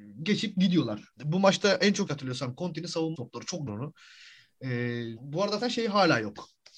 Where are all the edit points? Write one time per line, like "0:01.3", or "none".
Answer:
0:01.1
0:02.1
0:03.1
0:03.7
0:05.2
0:05.6